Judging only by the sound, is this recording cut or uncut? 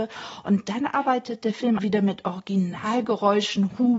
cut